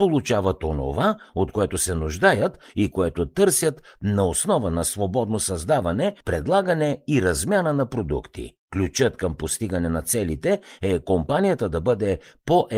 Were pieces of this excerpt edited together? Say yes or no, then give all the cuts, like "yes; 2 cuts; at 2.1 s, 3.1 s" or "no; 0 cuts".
yes; 2 cuts; at 6.2 s, 8.6 s